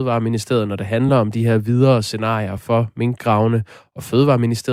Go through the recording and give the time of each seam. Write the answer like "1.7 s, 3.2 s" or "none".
none